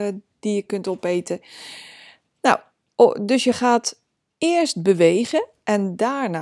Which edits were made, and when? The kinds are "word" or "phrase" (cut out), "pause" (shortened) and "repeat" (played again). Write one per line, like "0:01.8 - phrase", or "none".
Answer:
none